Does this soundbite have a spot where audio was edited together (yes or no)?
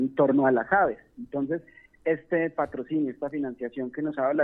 no